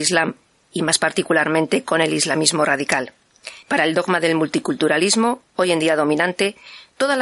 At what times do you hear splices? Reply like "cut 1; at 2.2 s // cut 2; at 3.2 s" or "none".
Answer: cut 1; at 3.6 s